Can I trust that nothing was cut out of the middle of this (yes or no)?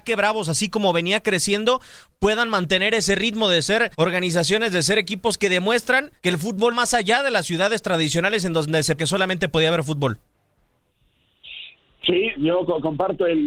no